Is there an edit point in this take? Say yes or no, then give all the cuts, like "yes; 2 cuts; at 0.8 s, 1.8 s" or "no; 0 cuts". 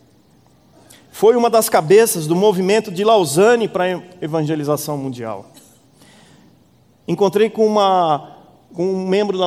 no; 0 cuts